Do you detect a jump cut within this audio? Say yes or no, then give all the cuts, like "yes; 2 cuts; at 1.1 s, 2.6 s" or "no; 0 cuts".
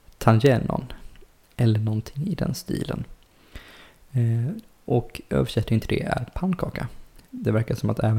no; 0 cuts